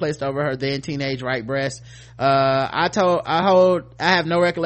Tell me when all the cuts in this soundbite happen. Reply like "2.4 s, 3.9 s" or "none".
none